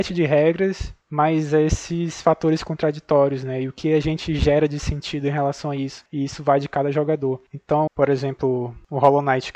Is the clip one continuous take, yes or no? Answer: no